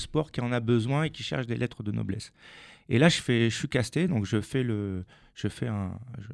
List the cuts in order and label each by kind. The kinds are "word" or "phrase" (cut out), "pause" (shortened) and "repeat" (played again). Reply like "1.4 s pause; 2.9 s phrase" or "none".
none